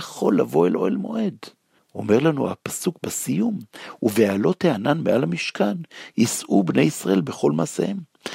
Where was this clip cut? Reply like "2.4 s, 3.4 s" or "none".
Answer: 1.8 s